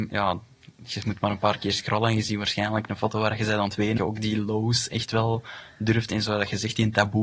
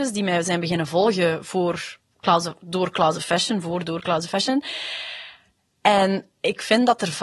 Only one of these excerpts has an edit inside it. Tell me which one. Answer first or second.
first